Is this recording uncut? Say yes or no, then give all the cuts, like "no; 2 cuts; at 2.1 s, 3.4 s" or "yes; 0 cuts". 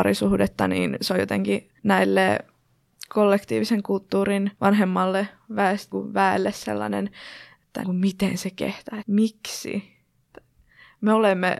no; 5 cuts; at 1.8 s, 4.5 s, 5.9 s, 7.8 s, 9.0 s